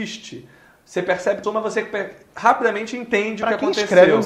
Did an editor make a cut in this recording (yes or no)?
yes